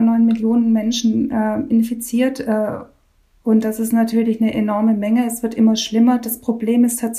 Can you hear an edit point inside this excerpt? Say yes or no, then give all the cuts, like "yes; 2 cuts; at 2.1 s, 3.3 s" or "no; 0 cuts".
no; 0 cuts